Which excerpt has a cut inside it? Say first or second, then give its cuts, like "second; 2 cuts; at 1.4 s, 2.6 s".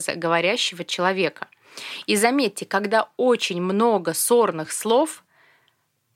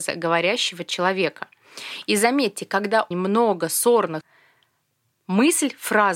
second; 2 cuts; at 3.1 s, 4.2 s